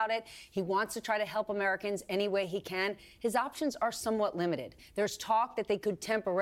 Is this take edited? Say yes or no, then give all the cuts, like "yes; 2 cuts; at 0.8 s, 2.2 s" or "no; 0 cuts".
no; 0 cuts